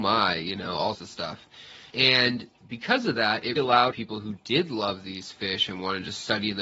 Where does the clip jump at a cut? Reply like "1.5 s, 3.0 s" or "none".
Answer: 0.9 s, 1.9 s, 3.6 s, 3.9 s

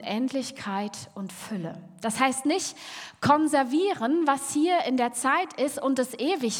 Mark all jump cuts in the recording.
none

